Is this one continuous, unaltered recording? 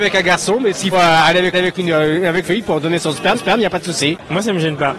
no; 4 cuts; at 0.9 s, 1.5 s, 2.4 s, 3.3 s

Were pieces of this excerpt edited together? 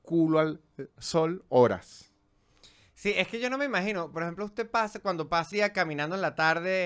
yes; 2 cuts; at 4.1 s, 5.5 s

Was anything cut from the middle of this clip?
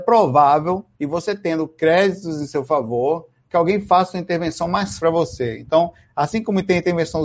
yes; 2 cuts; at 0.9 s, 5.0 s

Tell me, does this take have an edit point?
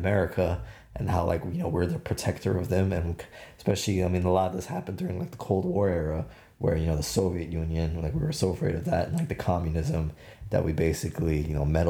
no; 0 cuts

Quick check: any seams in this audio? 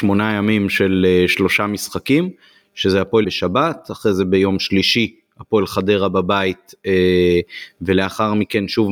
yes; 1 cut; at 3.2 s

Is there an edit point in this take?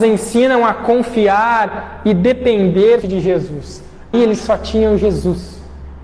yes; 2 cuts; at 3.0 s, 4.1 s

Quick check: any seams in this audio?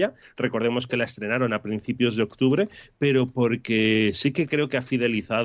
no; 0 cuts

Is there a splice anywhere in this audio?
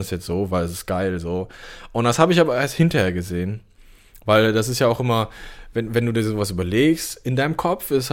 no; 0 cuts

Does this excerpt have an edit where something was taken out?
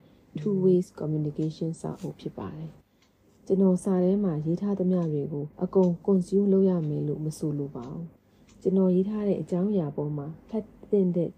yes; 3 cuts; at 2.8 s, 5.5 s, 8.2 s

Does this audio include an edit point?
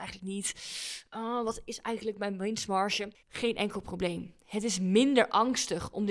yes; 1 cut; at 3.2 s

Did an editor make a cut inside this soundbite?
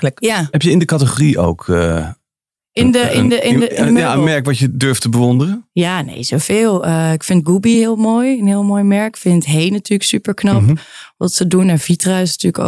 no; 0 cuts

